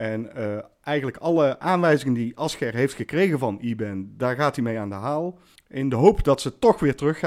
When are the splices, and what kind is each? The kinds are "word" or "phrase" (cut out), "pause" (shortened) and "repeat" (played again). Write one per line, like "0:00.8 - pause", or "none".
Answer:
0:05.6 - pause